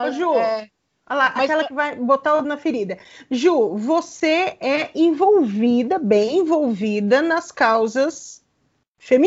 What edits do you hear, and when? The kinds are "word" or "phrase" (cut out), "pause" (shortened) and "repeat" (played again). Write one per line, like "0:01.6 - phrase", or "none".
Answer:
0:02.4 - word